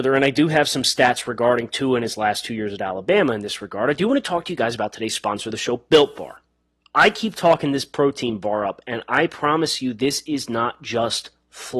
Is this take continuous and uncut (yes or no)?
yes